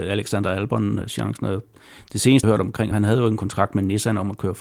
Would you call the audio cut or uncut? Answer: cut